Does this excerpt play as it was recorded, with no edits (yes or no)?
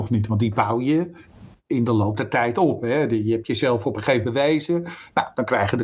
no